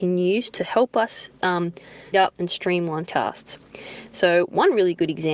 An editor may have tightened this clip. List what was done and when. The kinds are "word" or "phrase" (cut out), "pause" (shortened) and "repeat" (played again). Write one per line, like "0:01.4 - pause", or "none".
0:02.1 - word
0:03.0 - word